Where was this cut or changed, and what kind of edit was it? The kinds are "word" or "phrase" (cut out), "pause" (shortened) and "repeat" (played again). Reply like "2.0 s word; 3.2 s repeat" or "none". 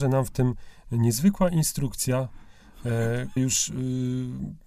3.4 s word